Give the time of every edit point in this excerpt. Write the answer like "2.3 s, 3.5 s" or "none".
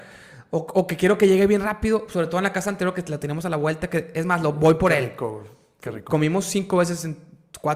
none